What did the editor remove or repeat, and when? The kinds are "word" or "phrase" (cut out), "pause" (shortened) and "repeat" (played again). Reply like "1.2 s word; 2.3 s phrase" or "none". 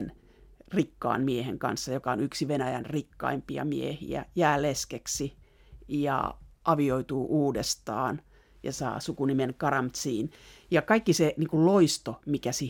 none